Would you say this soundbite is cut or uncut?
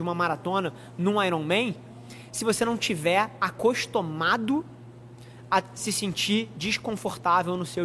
uncut